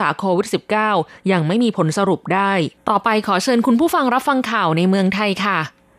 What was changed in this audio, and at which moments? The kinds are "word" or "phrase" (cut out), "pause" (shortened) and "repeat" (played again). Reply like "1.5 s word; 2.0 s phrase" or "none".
2.8 s pause